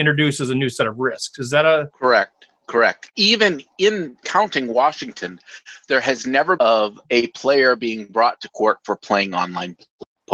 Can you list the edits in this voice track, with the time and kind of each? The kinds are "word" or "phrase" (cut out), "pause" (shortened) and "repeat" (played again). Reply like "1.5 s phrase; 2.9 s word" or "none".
3.7 s word; 4.2 s word; 6.6 s phrase; 7.0 s pause